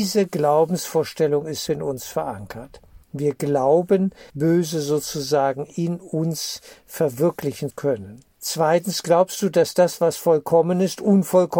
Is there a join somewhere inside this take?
yes; 5 cuts; at 1.7 s, 3.0 s, 4.3 s, 7.7 s, 8.3 s

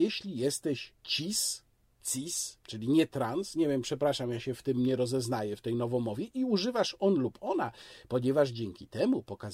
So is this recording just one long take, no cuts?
no; 2 cuts; at 1.0 s, 2.6 s

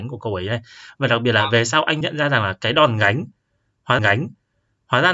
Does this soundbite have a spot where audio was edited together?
yes; 2 cuts; at 2.0 s, 4.0 s

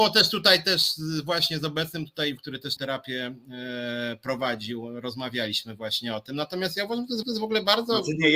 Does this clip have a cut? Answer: yes; 3 cuts; at 2.4 s, 2.8 s, 7.2 s

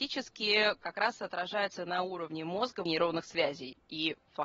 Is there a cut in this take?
yes; 1 cut; at 2.9 s

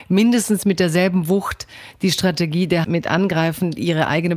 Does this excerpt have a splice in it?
yes; 1 cut; at 2.8 s

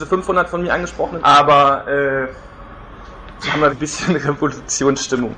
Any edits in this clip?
yes; 2 cuts; at 1.2 s, 3.7 s

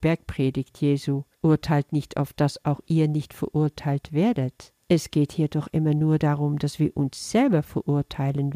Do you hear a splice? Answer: yes; 2 cuts; at 1.3 s, 4.8 s

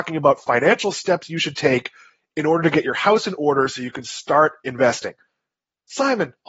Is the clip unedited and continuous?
yes; 0 cuts

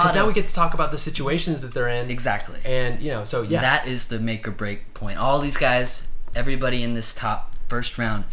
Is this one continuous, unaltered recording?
yes; 0 cuts

